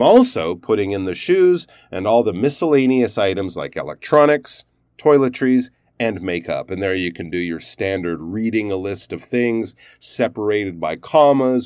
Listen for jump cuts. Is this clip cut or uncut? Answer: uncut